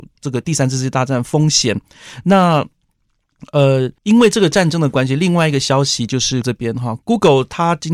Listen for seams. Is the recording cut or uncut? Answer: cut